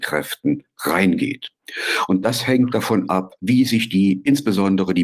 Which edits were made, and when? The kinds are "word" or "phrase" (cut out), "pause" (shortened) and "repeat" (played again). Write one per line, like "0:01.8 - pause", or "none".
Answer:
0:02.7 - word
0:03.4 - pause

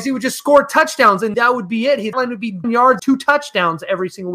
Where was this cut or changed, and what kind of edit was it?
0:01.3 - word
0:02.1 - word
0:02.6 - word
0:03.0 - word

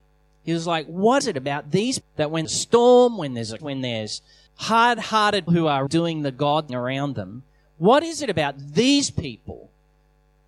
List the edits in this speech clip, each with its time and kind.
0:01.2 - word
0:02.0 - word
0:02.4 - word
0:03.6 - word
0:04.5 - word
0:05.5 - word
0:05.9 - word
0:06.7 - word

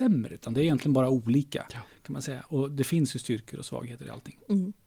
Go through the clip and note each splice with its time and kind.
none

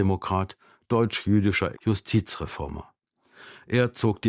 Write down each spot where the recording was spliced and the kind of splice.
0:01.7 - word

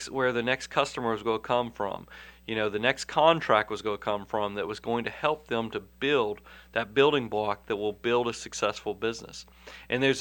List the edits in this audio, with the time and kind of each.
none

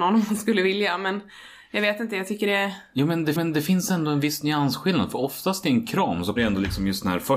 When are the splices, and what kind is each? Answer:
0:03.4 - repeat
0:06.4 - word

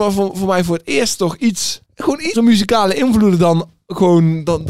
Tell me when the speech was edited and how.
0:01.8 - pause
0:02.4 - word

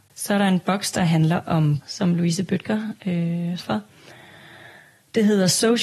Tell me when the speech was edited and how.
0:01.8 - word
0:03.6 - word

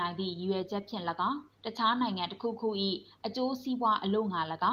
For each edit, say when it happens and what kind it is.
0:01.5 - pause

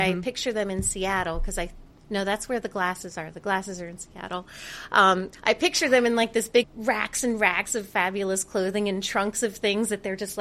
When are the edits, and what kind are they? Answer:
0:06.6 - phrase

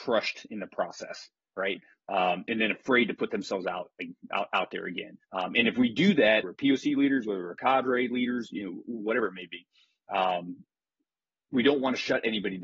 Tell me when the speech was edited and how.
0:05.2 - pause
0:06.4 - phrase

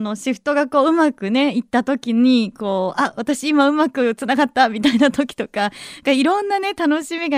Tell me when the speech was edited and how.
none

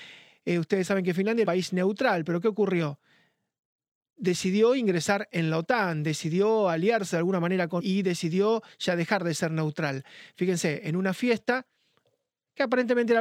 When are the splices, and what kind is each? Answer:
0:01.4 - word
0:07.8 - word

